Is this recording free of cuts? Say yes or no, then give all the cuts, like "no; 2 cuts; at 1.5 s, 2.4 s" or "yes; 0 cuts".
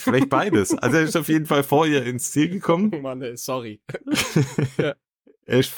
yes; 0 cuts